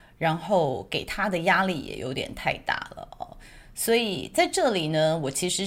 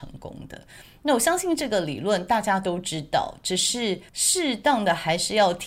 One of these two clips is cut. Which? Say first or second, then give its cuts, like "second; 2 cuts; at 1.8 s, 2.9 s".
second; 1 cut; at 4.1 s